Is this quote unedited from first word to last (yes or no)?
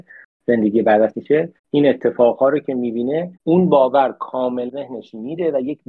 no